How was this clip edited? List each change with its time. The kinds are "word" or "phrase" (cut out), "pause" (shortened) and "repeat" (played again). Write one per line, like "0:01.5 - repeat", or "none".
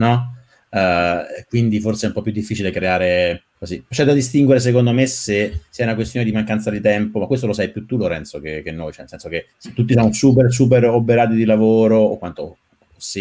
0:03.5 - pause
0:05.7 - pause
0:09.5 - pause